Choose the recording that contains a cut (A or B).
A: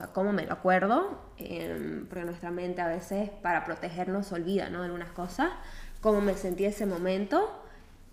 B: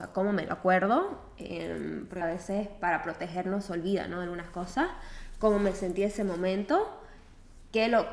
B